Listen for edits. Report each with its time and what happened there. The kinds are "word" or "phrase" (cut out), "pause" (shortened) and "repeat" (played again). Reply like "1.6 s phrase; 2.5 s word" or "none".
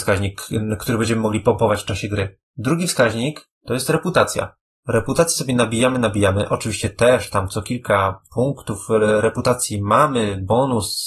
none